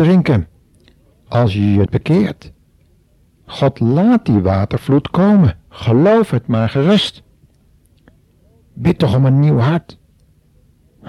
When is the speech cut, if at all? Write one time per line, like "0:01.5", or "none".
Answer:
0:01.9
0:05.7